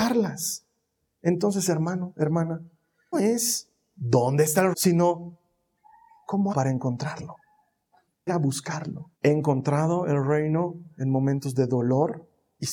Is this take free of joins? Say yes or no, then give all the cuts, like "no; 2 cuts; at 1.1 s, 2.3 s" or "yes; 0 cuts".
no; 5 cuts; at 3.1 s, 4.7 s, 6.5 s, 8.3 s, 9.2 s